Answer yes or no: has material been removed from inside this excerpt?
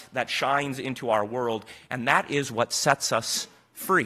no